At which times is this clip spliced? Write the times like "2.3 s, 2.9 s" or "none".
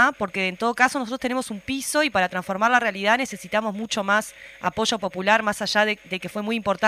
none